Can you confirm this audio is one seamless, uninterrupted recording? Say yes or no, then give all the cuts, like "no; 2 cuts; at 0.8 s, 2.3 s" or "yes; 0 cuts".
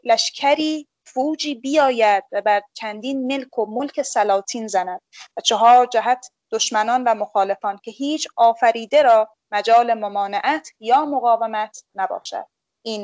yes; 0 cuts